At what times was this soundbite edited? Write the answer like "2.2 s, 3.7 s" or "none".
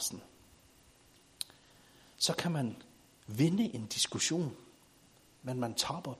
none